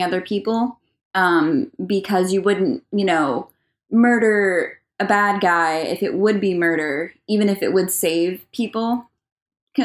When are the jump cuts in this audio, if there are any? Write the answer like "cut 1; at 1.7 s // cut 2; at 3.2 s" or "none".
none